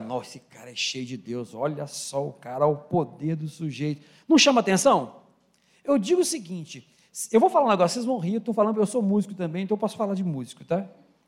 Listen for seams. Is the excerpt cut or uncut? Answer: uncut